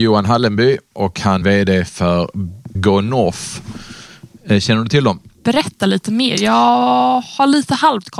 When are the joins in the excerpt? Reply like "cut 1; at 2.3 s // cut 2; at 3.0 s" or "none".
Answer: cut 1; at 1.4 s // cut 2; at 2.7 s